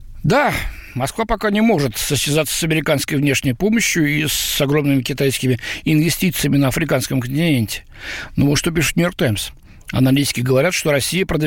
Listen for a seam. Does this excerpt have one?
no; 0 cuts

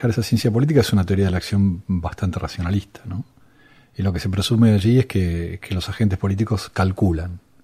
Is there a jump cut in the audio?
no; 0 cuts

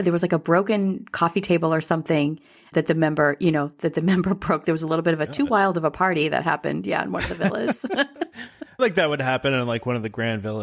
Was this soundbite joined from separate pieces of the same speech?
yes; 2 cuts; at 2.7 s, 8.8 s

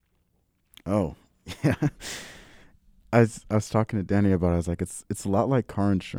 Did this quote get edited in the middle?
no; 0 cuts

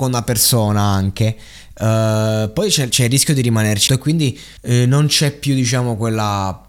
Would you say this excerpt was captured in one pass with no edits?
no; 3 cuts; at 2.9 s, 3.9 s, 4.6 s

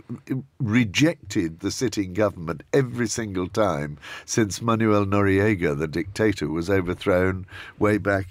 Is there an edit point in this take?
no; 0 cuts

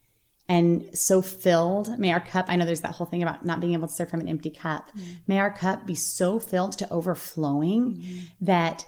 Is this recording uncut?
yes; 0 cuts

